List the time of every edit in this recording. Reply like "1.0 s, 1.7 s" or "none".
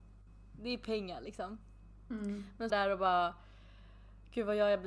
2.7 s